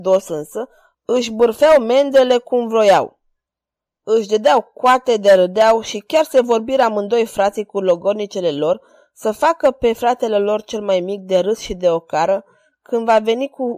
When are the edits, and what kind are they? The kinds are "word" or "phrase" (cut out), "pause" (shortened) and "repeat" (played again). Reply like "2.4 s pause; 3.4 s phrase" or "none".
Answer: none